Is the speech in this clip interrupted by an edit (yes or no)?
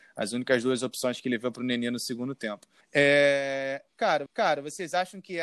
yes